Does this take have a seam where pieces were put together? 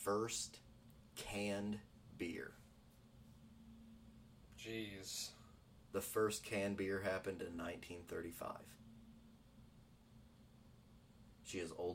no; 0 cuts

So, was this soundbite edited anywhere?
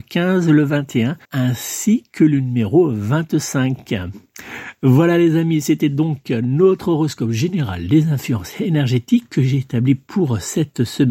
yes; 1 cut; at 1.2 s

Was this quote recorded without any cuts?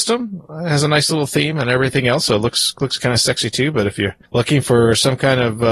no; 1 cut; at 4.3 s

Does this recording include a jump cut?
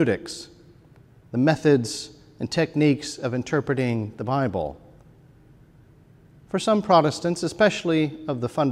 no; 0 cuts

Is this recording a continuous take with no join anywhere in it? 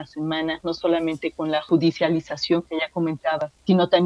yes; 0 cuts

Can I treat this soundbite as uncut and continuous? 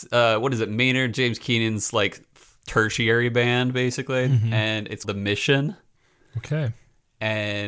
no; 1 cut; at 5.0 s

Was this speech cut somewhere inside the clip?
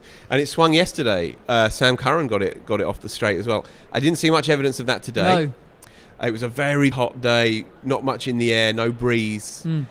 yes; 2 cuts; at 6.9 s, 7.8 s

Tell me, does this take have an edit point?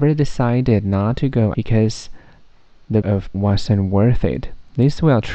yes; 3 cuts; at 1.5 s, 3.0 s, 3.3 s

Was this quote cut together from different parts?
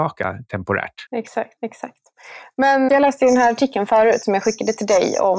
yes; 1 cut; at 2.9 s

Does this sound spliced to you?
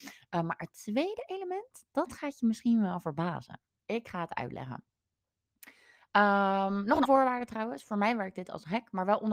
yes; 1 cut; at 7.0 s

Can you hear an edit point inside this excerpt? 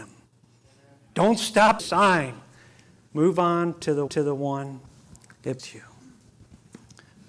yes; 3 cuts; at 1.8 s, 4.1 s, 5.6 s

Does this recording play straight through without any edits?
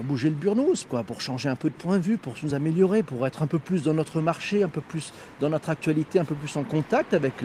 yes; 0 cuts

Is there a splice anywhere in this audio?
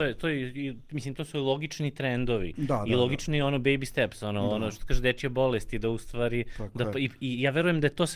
no; 0 cuts

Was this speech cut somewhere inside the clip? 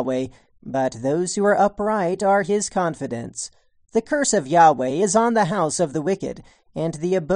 no; 0 cuts

